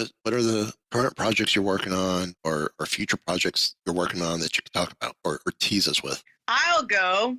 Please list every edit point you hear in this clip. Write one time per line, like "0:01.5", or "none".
none